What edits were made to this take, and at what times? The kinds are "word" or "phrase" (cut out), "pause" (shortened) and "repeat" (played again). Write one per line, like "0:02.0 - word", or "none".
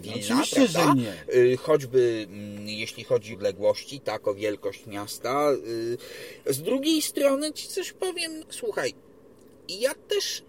0:03.3 - word
0:07.5 - word
0:08.4 - word